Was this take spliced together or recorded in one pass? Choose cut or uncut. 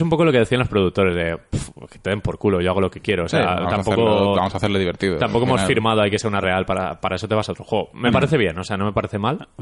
cut